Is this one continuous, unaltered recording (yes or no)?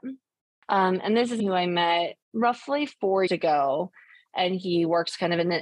no